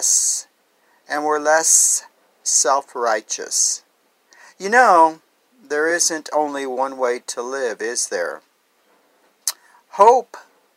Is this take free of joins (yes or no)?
yes